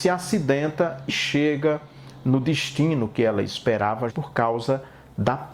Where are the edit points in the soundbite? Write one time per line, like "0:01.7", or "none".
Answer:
0:01.1
0:04.1